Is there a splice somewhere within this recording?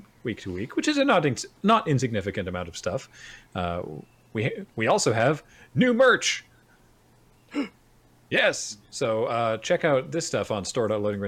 no; 0 cuts

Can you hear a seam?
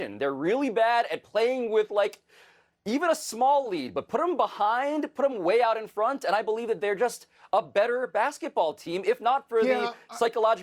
no; 0 cuts

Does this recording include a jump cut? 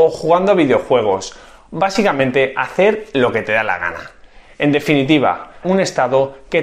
yes; 1 cut; at 5.6 s

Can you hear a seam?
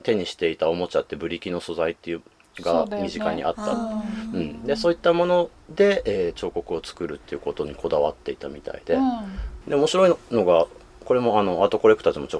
no; 0 cuts

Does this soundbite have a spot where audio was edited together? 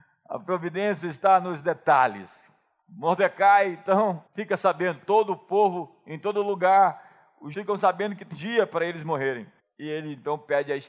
yes; 4 cuts; at 4.3 s, 7.5 s, 8.3 s, 9.6 s

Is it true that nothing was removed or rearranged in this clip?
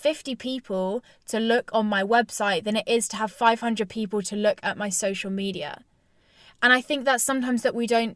yes; 0 cuts

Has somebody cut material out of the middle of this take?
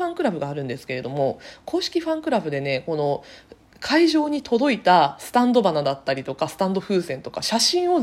no; 0 cuts

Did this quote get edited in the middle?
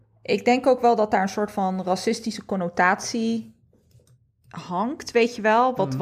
no; 0 cuts

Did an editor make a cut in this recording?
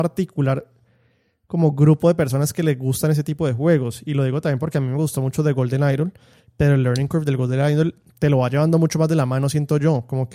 no; 0 cuts

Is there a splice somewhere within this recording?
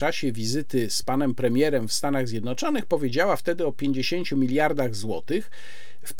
no; 0 cuts

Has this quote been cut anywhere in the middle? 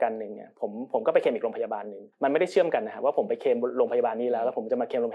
yes; 1 cut; at 2.1 s

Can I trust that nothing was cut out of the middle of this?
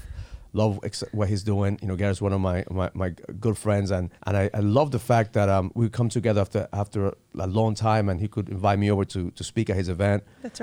no; 1 cut; at 4.2 s

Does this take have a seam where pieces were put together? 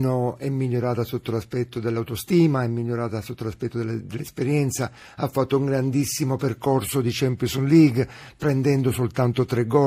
no; 0 cuts

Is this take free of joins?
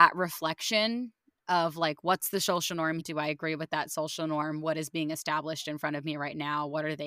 no; 1 cut; at 3.0 s

